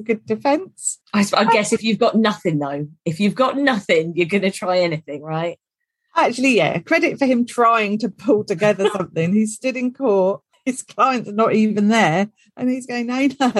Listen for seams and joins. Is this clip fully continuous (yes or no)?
yes